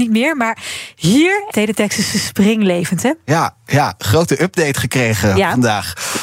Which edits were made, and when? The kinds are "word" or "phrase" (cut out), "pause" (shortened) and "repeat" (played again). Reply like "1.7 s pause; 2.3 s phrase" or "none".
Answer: 1.5 s word; 2.1 s repeat